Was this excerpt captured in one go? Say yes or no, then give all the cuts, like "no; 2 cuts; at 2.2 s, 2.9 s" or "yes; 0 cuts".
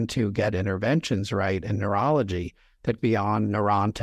no; 1 cut; at 3.0 s